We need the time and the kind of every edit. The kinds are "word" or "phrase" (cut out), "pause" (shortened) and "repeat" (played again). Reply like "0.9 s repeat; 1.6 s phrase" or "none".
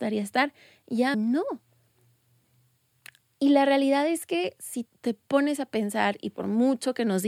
1.1 s word; 3.2 s pause; 4.9 s word